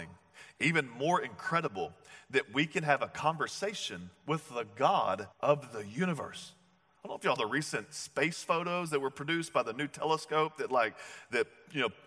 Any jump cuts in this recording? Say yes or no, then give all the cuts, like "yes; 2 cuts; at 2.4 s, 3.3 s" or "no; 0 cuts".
yes; 2 cuts; at 5.3 s, 7.4 s